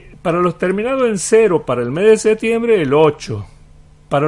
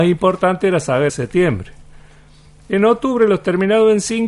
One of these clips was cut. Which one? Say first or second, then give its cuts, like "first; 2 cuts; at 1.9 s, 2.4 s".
second; 1 cut; at 1.1 s